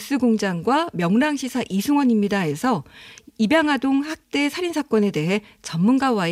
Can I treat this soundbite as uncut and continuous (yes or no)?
yes